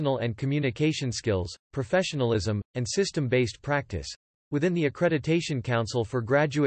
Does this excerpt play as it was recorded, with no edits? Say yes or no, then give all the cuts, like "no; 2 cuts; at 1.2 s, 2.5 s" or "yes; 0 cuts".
yes; 0 cuts